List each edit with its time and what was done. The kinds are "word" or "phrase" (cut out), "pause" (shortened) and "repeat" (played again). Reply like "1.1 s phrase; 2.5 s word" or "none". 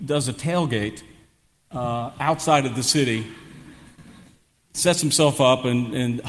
none